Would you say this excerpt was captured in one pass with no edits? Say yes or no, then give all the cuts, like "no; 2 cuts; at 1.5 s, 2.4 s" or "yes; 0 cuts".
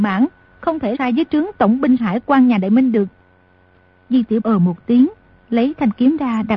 no; 3 cuts; at 0.9 s, 2.0 s, 4.4 s